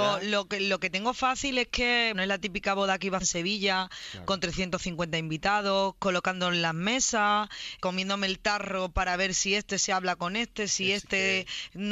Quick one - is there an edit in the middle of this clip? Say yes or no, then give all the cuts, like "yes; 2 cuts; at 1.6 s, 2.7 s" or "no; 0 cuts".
yes; 3 cuts; at 2.1 s, 3.2 s, 7.8 s